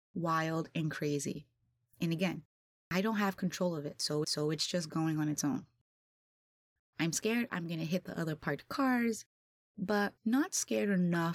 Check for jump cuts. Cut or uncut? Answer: cut